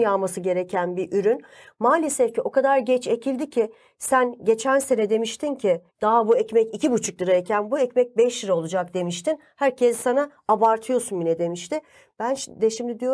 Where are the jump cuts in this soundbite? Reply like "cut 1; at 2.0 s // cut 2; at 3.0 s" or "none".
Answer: cut 1; at 5.9 s